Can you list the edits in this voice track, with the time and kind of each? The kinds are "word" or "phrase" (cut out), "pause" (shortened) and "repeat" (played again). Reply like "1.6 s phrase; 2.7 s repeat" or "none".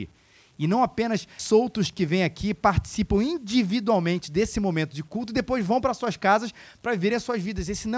1.4 s word

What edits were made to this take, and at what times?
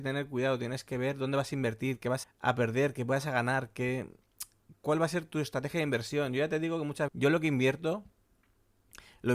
2.2 s word; 7.1 s word

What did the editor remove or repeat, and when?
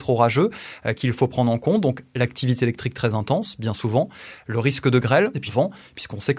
5.5 s word

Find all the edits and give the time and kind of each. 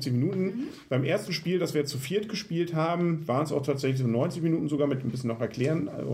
none

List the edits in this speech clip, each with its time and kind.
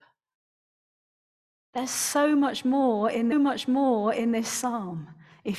3.3 s repeat

